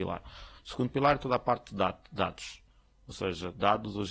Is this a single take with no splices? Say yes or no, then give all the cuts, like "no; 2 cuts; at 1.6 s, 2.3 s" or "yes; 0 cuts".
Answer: yes; 0 cuts